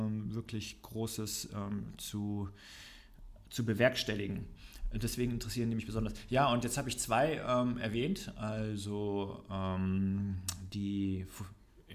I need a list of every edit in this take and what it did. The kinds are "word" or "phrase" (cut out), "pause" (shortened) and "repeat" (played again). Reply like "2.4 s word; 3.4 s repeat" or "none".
none